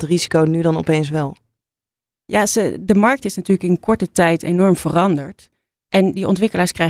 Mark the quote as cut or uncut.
uncut